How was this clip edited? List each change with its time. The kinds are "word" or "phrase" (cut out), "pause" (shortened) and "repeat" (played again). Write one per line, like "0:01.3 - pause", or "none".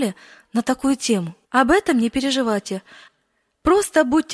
0:01.4 - pause